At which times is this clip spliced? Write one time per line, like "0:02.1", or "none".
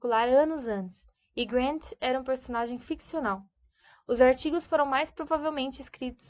none